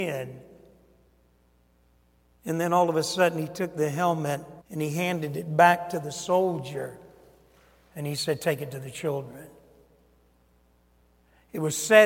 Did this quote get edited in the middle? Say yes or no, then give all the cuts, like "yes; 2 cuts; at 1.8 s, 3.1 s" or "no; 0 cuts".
yes; 1 cut; at 4.6 s